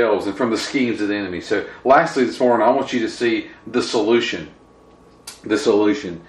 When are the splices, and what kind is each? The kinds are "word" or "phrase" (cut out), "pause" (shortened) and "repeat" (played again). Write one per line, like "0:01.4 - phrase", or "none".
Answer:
none